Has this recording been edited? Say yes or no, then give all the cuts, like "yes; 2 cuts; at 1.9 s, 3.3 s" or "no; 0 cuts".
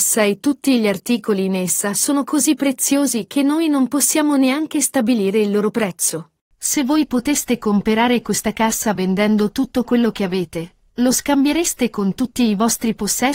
no; 0 cuts